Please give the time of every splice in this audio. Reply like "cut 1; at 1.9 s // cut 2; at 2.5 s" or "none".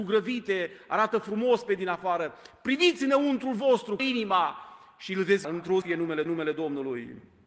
cut 1; at 4.0 s // cut 2; at 5.4 s // cut 3; at 5.8 s // cut 4; at 6.3 s